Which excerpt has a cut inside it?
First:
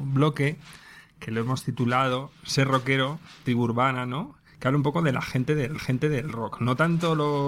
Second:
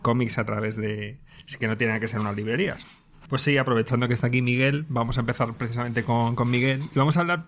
first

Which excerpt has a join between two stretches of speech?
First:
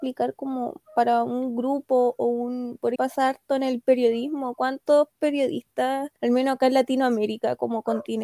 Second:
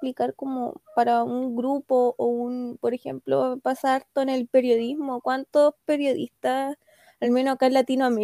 first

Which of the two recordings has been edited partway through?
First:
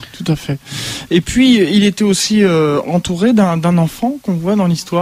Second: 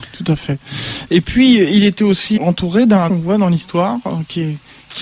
second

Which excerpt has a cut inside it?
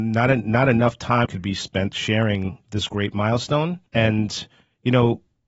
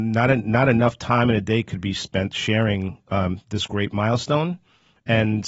first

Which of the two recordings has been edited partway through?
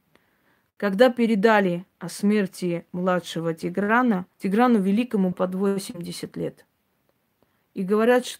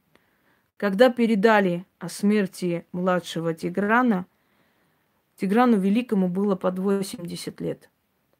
first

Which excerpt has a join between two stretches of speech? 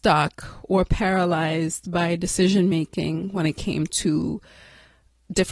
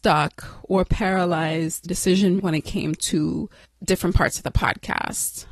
second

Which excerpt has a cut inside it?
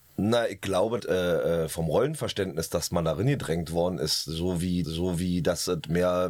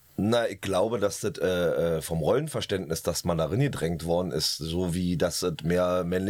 first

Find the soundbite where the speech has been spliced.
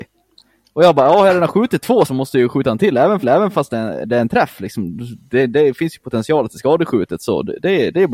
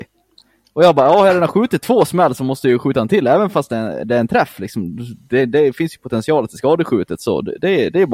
first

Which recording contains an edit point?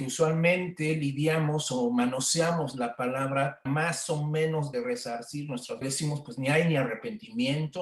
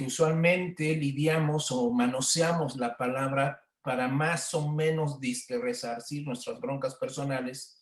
first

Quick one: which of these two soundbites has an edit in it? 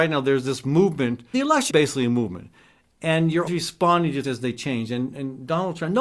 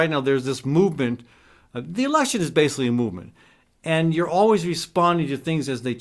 first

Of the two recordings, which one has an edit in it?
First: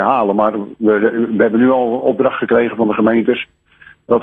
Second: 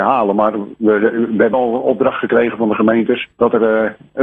second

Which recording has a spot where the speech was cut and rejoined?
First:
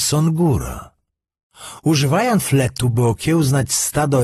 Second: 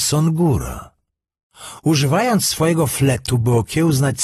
first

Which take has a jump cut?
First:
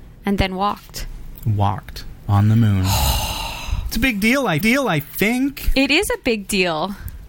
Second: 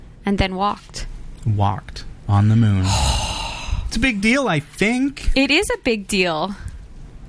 first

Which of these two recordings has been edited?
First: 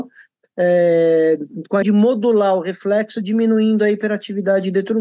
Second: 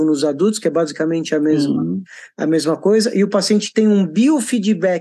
first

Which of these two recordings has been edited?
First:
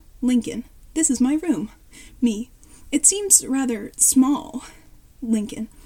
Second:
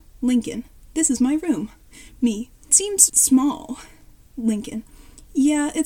second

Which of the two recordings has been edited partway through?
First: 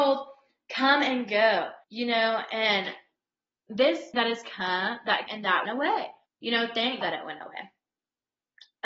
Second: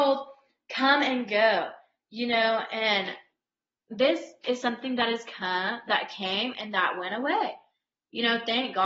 first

